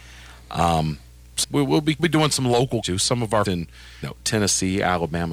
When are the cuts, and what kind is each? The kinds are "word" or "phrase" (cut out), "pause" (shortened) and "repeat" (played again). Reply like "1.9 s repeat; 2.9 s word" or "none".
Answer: 1.4 s word; 2.0 s word; 2.8 s word; 3.5 s word; 4.0 s word